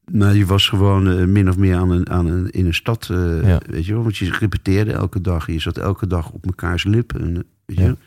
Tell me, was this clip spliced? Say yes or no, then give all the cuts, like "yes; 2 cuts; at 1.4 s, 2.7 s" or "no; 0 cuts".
no; 0 cuts